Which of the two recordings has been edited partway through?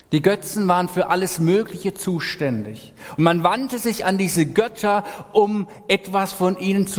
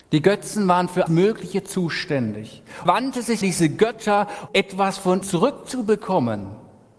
second; 5 cuts; at 1.1 s, 2.9 s, 3.4 s, 4.5 s, 5.2 s

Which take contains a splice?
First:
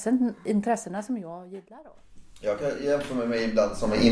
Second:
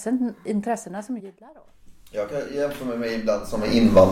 second; 1 cut; at 1.2 s

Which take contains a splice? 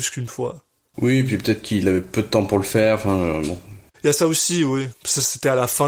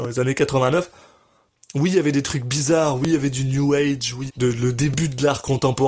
second; 1 cut; at 4.3 s

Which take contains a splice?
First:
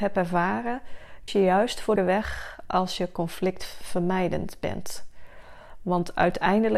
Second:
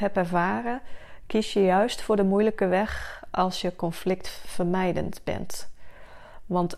first; 2 cuts; at 1.3 s, 2.0 s

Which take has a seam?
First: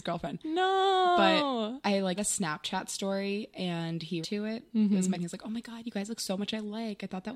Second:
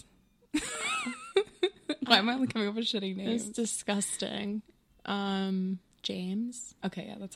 first; 3 cuts; at 2.2 s, 4.2 s, 5.1 s

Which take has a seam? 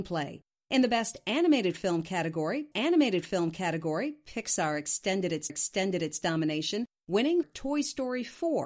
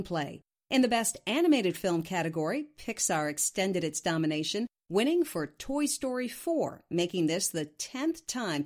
first; 3 cuts; at 2.7 s, 5.5 s, 7.4 s

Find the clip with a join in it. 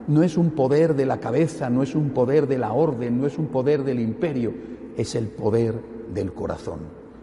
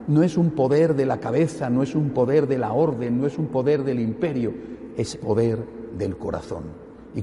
second; 1 cut; at 5.1 s

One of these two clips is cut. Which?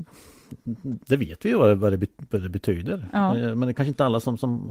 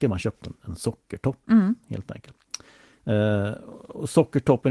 first; 1 cut; at 1.0 s

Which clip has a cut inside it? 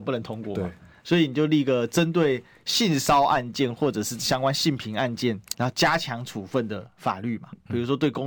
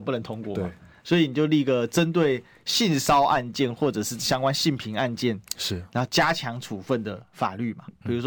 first; 1 cut; at 5.5 s

